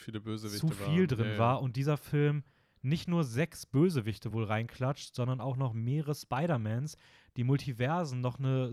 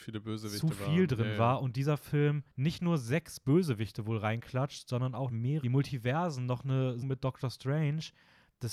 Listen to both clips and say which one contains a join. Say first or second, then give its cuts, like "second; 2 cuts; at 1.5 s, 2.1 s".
second; 4 cuts; at 2.5 s, 5.3 s, 5.6 s, 7.0 s